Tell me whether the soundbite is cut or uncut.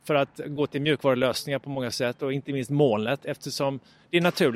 uncut